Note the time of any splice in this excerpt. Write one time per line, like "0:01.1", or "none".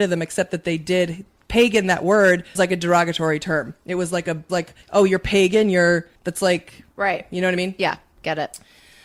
0:02.6
0:04.5
0:04.8
0:06.2